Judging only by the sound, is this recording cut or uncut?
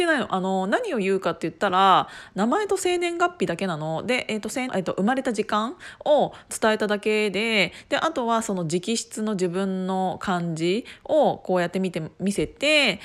cut